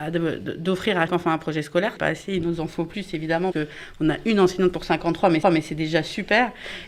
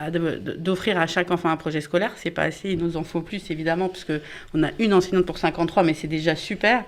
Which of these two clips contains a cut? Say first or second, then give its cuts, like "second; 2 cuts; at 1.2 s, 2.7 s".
first; 4 cuts; at 1.1 s, 2.0 s, 3.5 s, 5.4 s